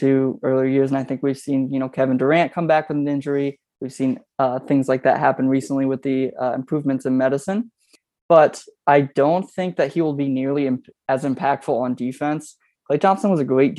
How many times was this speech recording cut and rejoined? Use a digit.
0